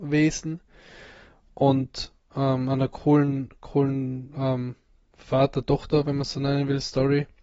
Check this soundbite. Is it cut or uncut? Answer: uncut